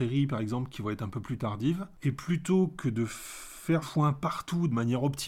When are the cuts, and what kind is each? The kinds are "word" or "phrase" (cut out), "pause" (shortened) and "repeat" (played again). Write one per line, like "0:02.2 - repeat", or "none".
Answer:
0:03.8 - word